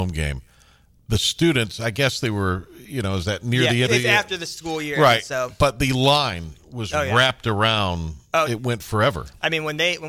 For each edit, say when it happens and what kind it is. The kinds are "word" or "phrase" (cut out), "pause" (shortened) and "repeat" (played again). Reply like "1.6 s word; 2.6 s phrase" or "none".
3.9 s word; 8.5 s word